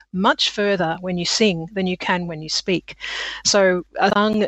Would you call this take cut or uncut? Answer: uncut